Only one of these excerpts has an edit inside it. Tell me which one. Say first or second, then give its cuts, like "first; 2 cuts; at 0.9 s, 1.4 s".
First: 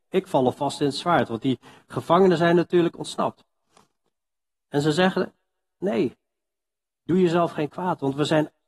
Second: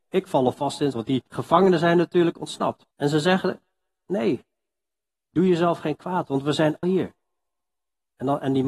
second; 4 cuts; at 0.9 s, 1.3 s, 2.9 s, 6.8 s